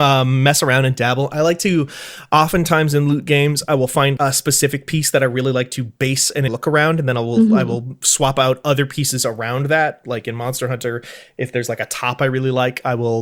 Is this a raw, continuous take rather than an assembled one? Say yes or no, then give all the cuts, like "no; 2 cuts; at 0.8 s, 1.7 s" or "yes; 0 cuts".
no; 2 cuts; at 4.2 s, 6.5 s